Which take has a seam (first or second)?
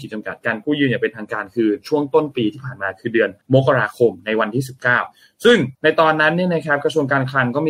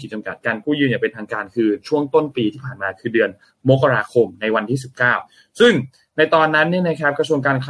first